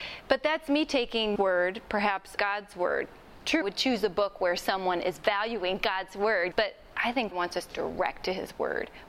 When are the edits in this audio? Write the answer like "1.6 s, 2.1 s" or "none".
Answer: 1.4 s, 2.4 s, 3.6 s, 6.5 s, 7.3 s, 7.7 s